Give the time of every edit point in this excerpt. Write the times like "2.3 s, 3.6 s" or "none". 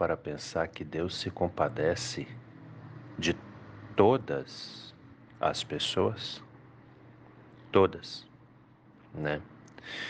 none